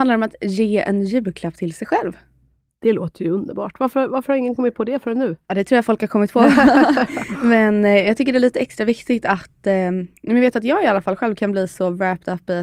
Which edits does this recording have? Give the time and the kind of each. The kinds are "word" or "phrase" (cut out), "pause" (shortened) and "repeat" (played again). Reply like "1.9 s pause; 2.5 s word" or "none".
none